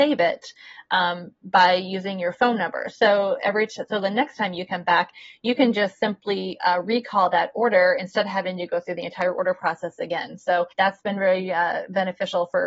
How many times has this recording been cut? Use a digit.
1